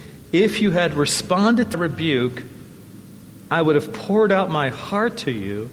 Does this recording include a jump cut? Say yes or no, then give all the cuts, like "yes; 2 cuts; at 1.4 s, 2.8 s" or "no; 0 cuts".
yes; 1 cut; at 1.7 s